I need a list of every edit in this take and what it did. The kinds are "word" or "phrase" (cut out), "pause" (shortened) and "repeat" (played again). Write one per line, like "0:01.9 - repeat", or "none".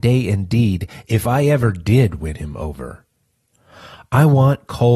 none

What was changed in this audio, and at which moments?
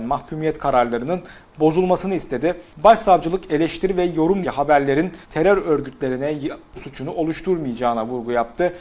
0:02.7 - pause
0:04.4 - word
0:05.2 - pause
0:06.7 - word

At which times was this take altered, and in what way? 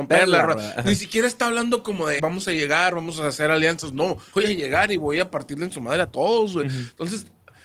0:02.2 - word
0:04.3 - word

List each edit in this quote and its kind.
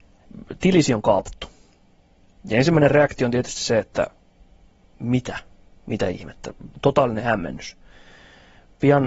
none

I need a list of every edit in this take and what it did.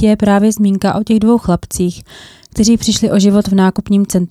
none

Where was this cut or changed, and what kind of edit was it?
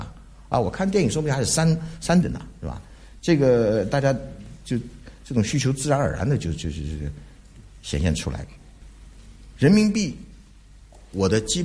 0:02.2 - word

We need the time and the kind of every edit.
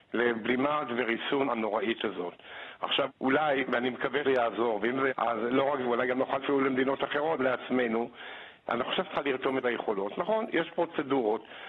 0:01.5 - word
0:03.1 - word
0:04.2 - word
0:05.1 - word
0:05.8 - word
0:06.4 - word
0:07.4 - word
0:09.0 - word
0:09.6 - word

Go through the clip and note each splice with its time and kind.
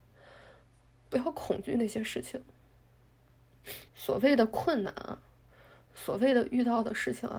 0:03.9 - pause

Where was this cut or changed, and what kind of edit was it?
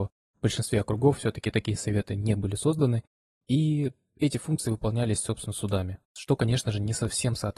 0:06.0 - pause

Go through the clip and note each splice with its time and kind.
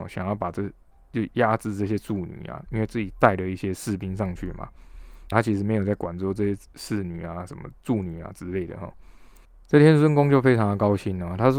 0:05.3 - word

